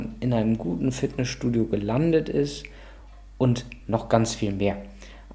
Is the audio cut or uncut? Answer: uncut